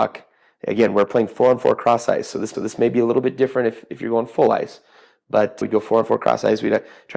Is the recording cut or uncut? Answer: cut